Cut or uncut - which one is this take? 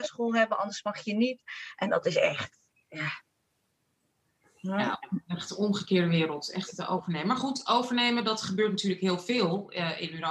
uncut